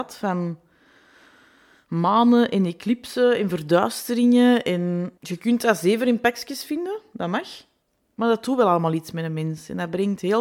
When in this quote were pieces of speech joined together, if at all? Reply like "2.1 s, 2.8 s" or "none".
5.2 s, 7.8 s